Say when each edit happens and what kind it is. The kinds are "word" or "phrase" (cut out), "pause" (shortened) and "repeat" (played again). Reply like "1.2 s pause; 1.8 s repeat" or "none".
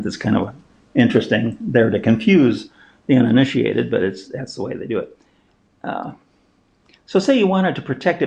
none